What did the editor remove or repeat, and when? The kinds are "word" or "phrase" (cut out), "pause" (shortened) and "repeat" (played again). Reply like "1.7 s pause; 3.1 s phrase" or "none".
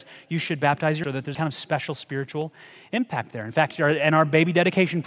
1.0 s word; 1.3 s word

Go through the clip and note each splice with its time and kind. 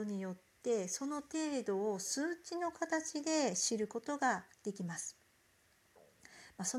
4.5 s pause

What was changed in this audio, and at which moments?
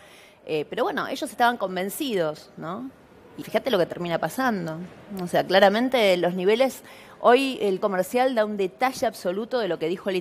3.4 s word; 7.8 s word

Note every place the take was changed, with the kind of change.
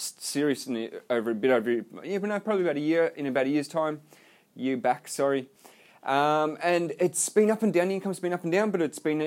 none

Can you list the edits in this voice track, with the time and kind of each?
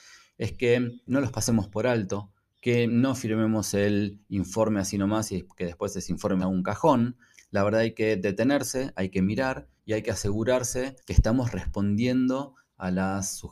1.1 s word; 6.4 s word; 7.3 s pause; 9.8 s pause; 11.0 s pause

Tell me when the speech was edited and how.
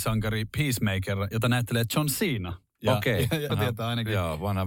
1.3 s word; 3.5 s word

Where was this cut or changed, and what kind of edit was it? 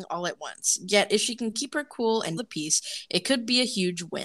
2.4 s word

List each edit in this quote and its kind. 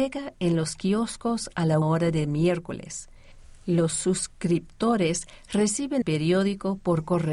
1.8 s word; 6.0 s word

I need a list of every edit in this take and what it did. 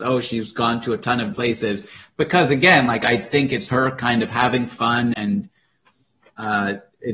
1.3 s word; 3.7 s word; 5.1 s word

